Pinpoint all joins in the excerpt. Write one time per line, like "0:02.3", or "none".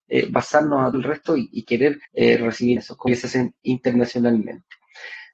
0:00.9
0:02.0
0:02.8
0:03.1